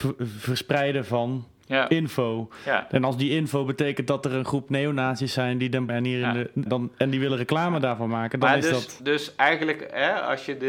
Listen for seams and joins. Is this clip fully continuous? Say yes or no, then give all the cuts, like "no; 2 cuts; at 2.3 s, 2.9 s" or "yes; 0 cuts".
no; 2 cuts; at 5.9 s, 6.7 s